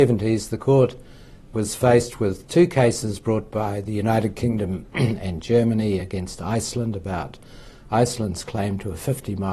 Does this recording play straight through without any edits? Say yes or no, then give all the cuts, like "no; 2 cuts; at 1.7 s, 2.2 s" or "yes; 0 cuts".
yes; 0 cuts